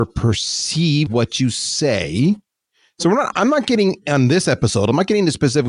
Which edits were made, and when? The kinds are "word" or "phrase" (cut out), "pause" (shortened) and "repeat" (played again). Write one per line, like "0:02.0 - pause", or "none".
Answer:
0:01.1 - word